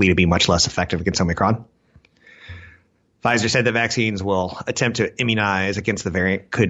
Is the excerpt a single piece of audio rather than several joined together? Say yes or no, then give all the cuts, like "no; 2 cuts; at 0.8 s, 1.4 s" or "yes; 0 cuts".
yes; 0 cuts